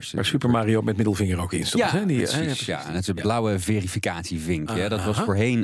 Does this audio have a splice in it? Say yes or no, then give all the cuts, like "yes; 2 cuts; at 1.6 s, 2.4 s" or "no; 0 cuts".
no; 0 cuts